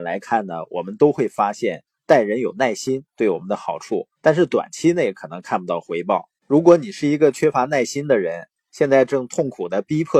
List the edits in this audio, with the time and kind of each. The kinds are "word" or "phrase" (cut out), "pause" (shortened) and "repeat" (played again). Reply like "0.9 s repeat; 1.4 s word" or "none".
4.2 s pause; 6.4 s pause